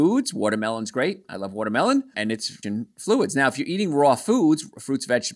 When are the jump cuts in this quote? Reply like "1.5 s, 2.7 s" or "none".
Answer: 2.1 s, 2.6 s